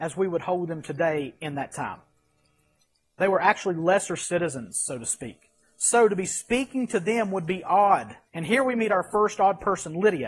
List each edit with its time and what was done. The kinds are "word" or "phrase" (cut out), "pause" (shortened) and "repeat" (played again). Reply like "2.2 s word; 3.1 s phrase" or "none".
8.3 s pause